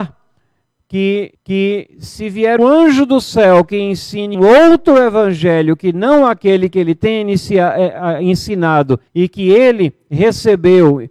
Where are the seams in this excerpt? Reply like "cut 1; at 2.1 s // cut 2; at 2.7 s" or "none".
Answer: cut 1; at 1.3 s // cut 2; at 2.6 s // cut 3; at 4.3 s // cut 4; at 9.1 s